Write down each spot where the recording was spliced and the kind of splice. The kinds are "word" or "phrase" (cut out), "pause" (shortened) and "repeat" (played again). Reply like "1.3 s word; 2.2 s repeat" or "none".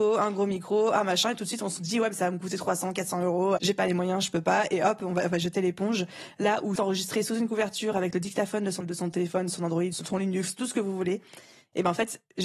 3.6 s word; 6.8 s word; 8.8 s word; 9.9 s word

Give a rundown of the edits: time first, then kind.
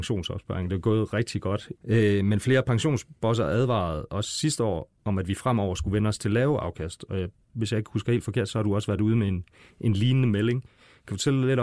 none

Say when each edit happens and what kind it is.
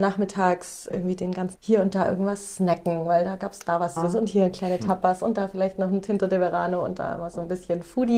0.9 s word; 1.6 s word; 4.0 s word

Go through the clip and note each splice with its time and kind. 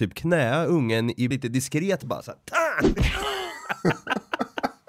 1.3 s word

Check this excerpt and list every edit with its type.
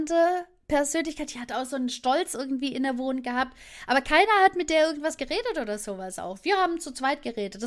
none

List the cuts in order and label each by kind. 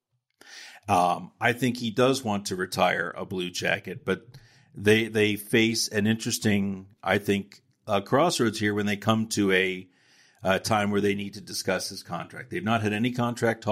none

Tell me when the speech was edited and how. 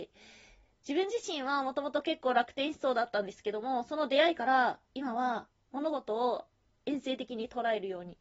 4.8 s pause; 5.5 s pause; 6.7 s pause

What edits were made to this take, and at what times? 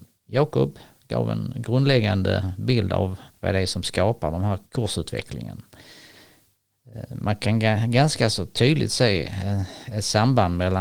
3.3 s pause; 4.7 s pause

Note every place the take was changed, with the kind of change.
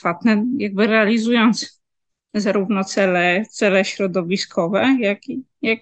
none

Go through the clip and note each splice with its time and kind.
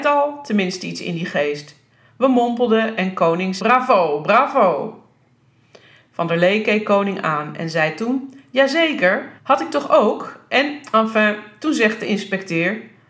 3.6 s phrase; 9.4 s pause

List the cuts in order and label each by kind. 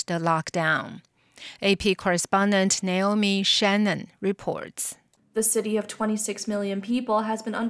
none

